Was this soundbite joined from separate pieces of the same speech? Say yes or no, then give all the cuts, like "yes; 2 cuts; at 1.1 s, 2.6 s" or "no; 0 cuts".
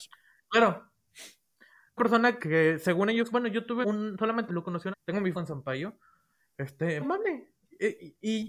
yes; 8 cuts; at 2.0 s, 2.4 s, 3.3 s, 3.8 s, 4.5 s, 4.9 s, 5.3 s, 7.0 s